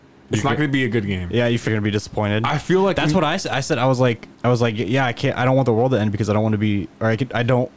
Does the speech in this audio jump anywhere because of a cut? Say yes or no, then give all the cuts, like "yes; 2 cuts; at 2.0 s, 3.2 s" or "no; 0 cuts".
yes; 2 cuts; at 1.7 s, 4.3 s